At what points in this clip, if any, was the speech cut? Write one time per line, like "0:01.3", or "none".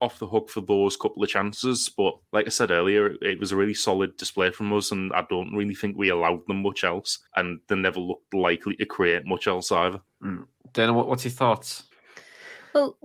0:02.2
0:07.3

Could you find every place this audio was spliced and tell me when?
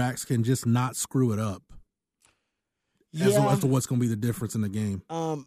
none

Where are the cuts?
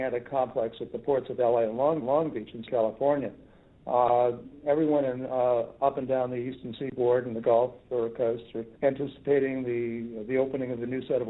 0:02.0
0:02.7
0:08.8

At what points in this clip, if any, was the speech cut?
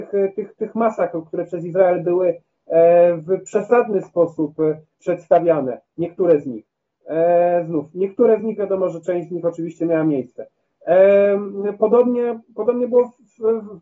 none

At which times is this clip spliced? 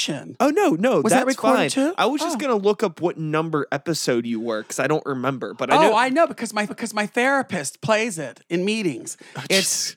0:06.7

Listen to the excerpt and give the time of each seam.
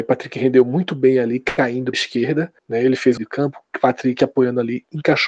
0:01.9
0:02.6
0:03.2

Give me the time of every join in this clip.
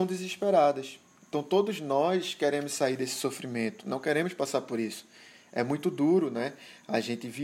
none

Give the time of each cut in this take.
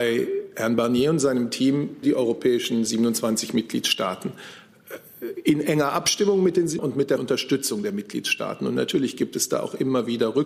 0:02.0
0:06.8
0:07.2

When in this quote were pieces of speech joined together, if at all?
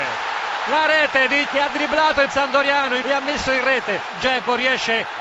0:01.5
0:02.3
0:03.0

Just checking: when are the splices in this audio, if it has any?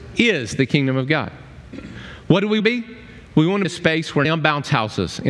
0:02.6
0:03.6
0:04.2

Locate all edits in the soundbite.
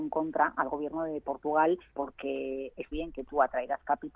0:01.9
0:02.9

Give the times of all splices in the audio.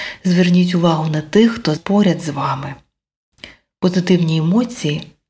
0:01.8

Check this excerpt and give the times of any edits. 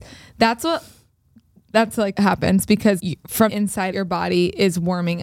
0:02.2
0:03.0
0:03.5
0:03.9

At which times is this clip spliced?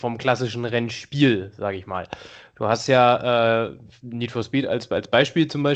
none

